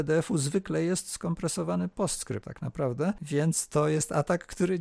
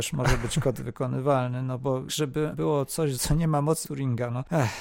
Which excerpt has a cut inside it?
second; 4 cuts; at 2.1 s, 2.5 s, 3.1 s, 3.8 s

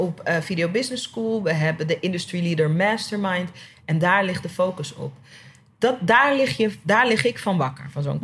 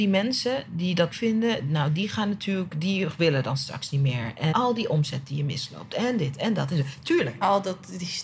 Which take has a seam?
second; 2 cuts; at 1.1 s, 4.5 s

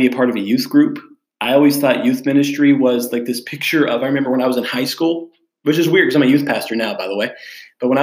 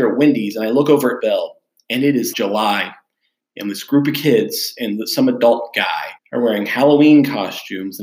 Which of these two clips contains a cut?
second; 3 cuts; at 1.2 s, 2.3 s, 6.2 s

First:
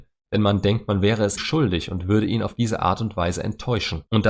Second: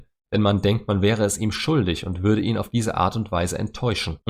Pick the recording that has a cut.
first; 1 cut; at 1.4 s

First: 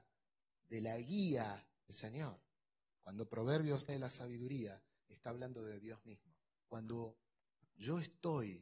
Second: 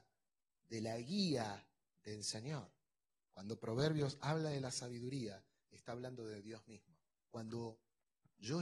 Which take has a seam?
first; 2 cuts; at 1.9 s, 3.9 s

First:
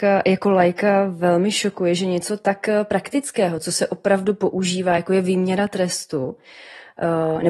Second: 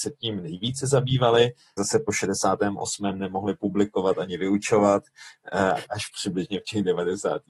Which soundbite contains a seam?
second; 2 cuts; at 1.8 s, 5.8 s

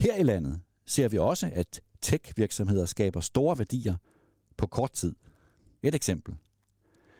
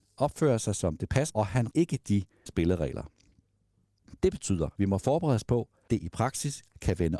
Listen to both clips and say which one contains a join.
second; 5 cuts; at 1.3 s, 1.7 s, 2.5 s, 4.8 s, 5.9 s

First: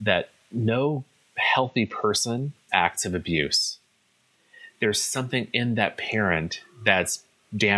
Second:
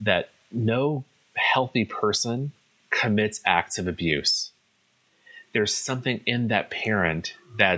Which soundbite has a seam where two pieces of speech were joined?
first; 1 cut; at 2.7 s

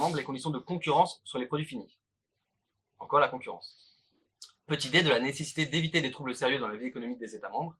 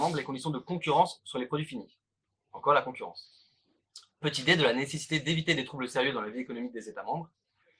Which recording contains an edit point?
second; 1 cut; at 2.2 s

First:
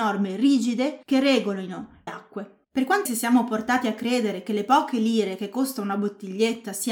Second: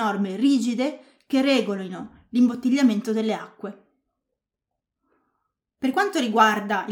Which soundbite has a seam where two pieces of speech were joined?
first; 4 cuts; at 1.0 s, 2.1 s, 2.6 s, 3.1 s

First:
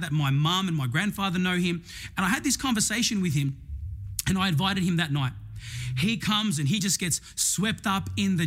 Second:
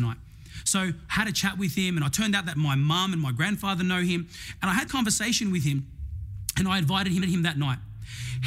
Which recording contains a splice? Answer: second; 2 cuts; at 4.9 s, 7.2 s

